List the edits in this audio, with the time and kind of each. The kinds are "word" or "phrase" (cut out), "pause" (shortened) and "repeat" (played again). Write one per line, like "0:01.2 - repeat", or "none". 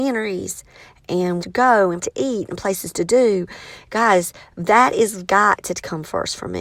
0:01.4 - phrase
0:02.0 - word